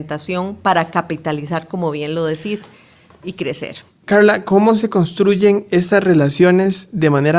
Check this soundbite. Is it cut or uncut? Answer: uncut